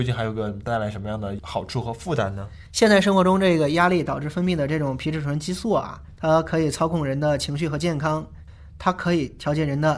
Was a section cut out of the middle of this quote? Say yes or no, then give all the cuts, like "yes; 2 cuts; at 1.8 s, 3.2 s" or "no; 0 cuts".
yes; 1 cut; at 2.7 s